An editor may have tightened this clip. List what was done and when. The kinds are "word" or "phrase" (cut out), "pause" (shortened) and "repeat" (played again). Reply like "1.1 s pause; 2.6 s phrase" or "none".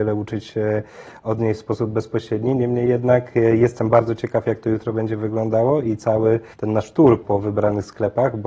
6.5 s pause; 7.2 s word